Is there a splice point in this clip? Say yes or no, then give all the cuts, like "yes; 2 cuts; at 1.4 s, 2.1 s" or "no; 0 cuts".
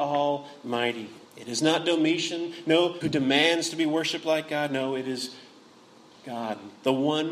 yes; 2 cuts; at 1.3 s, 3.0 s